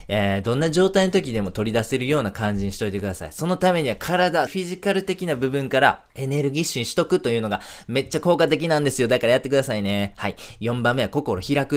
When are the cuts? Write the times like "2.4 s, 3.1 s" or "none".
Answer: 4.5 s, 6.1 s